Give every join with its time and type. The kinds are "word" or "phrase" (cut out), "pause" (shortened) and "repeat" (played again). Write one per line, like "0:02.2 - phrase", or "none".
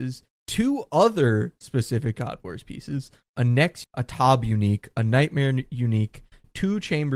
0:03.8 - word